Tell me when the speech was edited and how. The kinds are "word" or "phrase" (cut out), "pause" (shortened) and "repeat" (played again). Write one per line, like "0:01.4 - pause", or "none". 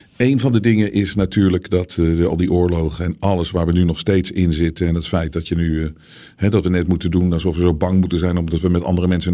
none